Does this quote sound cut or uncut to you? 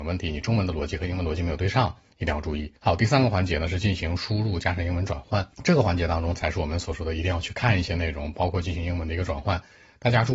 cut